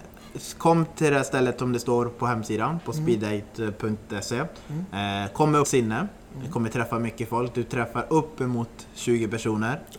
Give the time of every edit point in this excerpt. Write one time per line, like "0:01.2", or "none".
0:05.6